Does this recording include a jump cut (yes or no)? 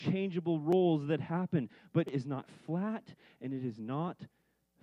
yes